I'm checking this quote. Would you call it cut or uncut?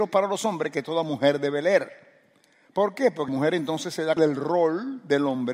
cut